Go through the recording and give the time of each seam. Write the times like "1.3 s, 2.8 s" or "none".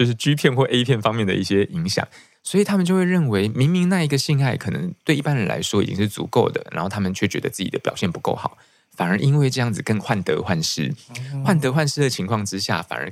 none